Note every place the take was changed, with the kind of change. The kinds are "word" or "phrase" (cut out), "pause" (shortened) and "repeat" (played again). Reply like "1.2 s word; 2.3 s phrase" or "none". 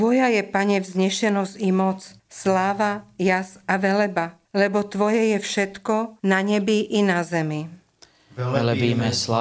2.2 s pause; 4.4 s pause; 6.2 s pause